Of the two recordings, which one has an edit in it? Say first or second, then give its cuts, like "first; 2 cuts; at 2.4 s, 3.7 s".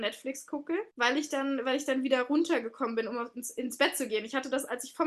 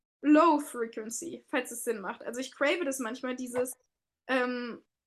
first; 1 cut; at 0.9 s